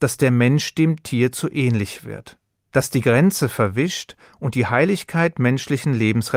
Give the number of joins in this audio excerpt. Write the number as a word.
zero